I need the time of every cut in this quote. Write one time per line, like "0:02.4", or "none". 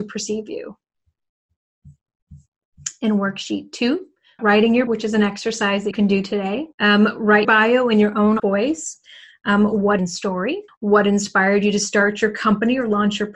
0:04.4
0:04.9
0:05.9
0:06.7
0:07.4
0:08.4
0:10.0
0:10.7